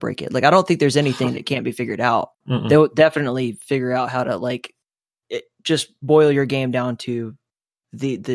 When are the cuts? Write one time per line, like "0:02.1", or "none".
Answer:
0:02.3